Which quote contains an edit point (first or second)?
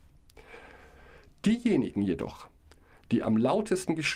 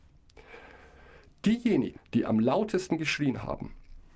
second